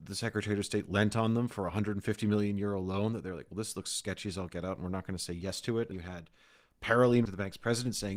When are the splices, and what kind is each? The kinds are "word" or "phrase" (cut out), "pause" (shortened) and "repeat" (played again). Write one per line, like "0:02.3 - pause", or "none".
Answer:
0:05.9 - word
0:07.3 - word